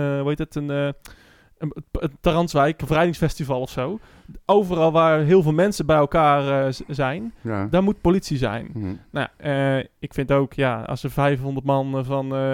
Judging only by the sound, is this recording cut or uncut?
cut